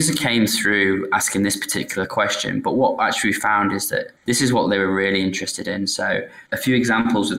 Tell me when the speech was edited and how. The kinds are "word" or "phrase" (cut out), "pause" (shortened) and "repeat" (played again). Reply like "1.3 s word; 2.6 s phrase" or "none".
4.2 s pause; 6.5 s pause